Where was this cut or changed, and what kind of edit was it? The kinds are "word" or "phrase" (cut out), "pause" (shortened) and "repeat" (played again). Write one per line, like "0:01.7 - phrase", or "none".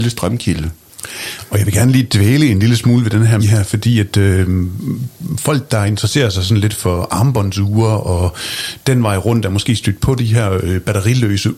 0:03.4 - word